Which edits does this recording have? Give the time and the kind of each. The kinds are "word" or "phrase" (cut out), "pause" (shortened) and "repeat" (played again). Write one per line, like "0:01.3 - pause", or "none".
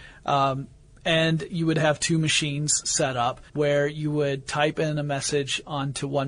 0:03.5 - pause